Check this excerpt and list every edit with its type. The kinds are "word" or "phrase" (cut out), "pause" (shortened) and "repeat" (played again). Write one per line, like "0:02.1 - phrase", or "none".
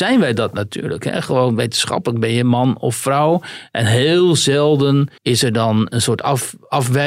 0:05.2 - pause